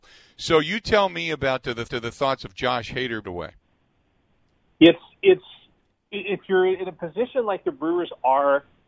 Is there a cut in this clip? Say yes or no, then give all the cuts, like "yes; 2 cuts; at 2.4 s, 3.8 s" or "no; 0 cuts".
yes; 2 cuts; at 1.9 s, 3.2 s